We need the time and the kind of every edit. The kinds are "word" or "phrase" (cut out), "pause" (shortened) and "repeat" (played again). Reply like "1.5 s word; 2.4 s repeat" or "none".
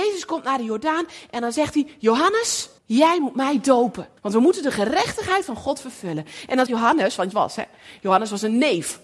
2.8 s pause; 4.2 s pause; 6.7 s word; 7.3 s phrase